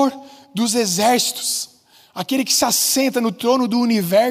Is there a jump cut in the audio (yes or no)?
no